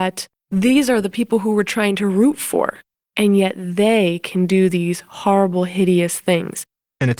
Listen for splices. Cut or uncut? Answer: uncut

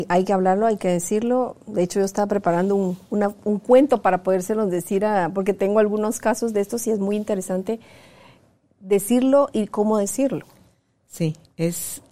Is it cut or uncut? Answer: uncut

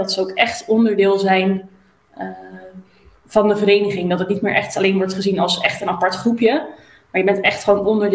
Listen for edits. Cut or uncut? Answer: uncut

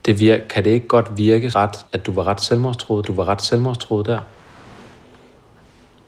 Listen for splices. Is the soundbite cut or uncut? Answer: cut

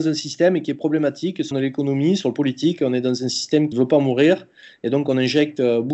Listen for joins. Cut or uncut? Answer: cut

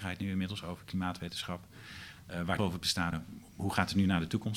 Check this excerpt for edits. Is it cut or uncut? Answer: cut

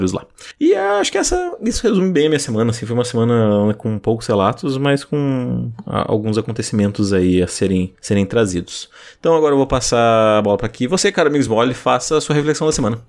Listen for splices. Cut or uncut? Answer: uncut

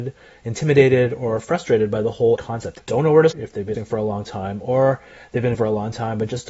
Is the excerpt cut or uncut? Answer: cut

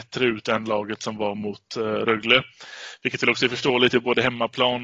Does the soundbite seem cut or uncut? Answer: uncut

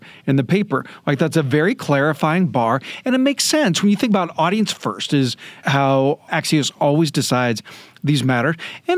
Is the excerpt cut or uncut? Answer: uncut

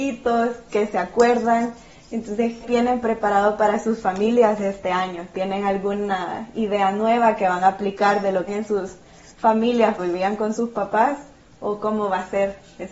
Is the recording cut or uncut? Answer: cut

